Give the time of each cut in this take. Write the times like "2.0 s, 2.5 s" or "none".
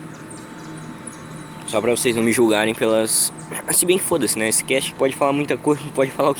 4.9 s